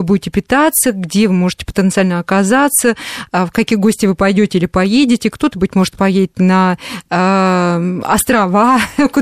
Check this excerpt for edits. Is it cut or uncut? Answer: uncut